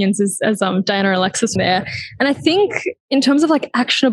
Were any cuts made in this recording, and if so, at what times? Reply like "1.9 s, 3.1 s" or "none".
1.6 s